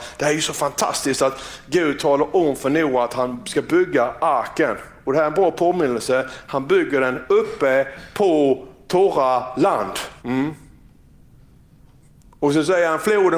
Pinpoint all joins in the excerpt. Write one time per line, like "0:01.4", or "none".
0:10.2